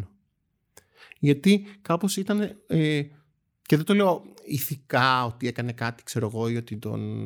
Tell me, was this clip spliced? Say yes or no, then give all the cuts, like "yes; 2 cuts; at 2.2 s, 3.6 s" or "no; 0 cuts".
no; 0 cuts